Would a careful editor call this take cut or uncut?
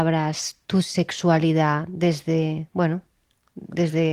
uncut